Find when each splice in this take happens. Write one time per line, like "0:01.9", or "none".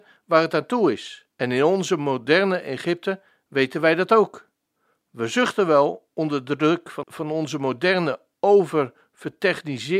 0:01.3
0:07.0

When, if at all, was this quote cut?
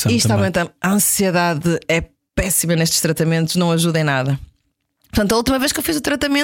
none

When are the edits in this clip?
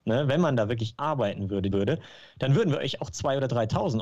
0:01.0
0:01.7

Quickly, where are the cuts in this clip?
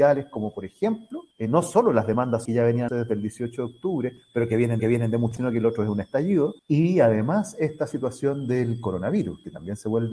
0:01.3
0:02.5
0:02.9
0:04.8
0:05.4
0:06.6

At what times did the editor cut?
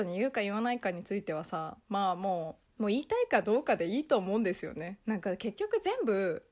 0:01.8

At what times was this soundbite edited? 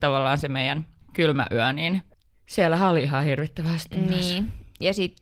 none

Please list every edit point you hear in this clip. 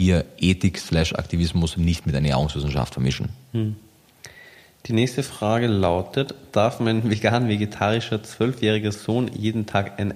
none

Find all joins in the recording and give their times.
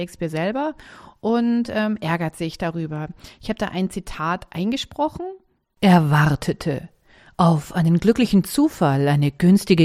none

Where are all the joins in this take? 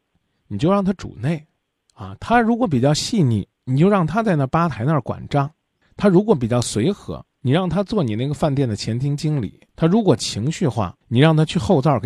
0:01.6
0:03.5
0:05.8
0:09.7
0:11.0

